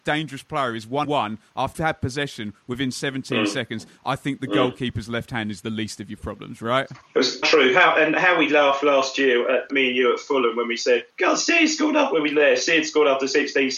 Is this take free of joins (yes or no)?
no